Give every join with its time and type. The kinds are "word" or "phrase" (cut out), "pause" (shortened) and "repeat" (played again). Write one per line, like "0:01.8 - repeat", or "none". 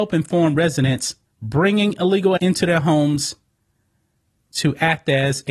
0:01.3 - word
0:02.4 - word

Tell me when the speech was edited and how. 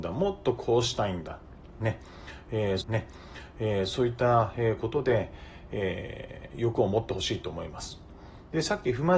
0:02.8 - repeat

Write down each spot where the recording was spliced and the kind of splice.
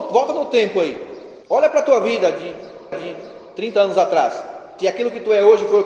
0:01.4 - pause
0:02.9 - repeat
0:04.8 - phrase

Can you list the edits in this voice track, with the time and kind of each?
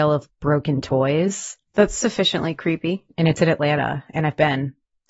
0:03.1 - pause

